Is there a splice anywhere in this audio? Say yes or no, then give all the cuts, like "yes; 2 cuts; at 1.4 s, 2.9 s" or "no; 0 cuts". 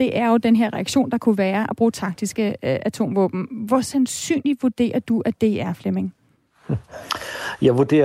no; 0 cuts